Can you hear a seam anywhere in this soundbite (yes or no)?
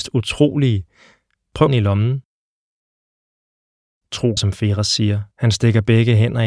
yes